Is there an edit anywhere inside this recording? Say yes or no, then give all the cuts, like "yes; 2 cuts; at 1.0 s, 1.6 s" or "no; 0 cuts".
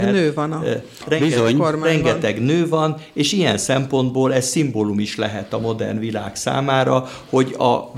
no; 0 cuts